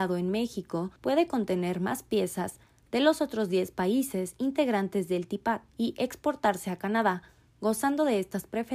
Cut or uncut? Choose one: cut